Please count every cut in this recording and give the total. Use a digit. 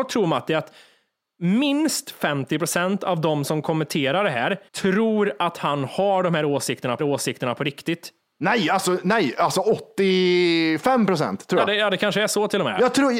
2